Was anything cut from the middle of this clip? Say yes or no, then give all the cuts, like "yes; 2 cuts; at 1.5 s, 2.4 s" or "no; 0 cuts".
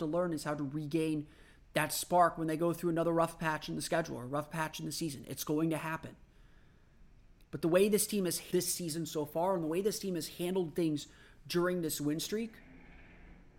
no; 0 cuts